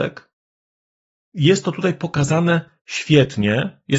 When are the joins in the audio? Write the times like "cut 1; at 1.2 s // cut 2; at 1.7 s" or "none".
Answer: cut 1; at 2.8 s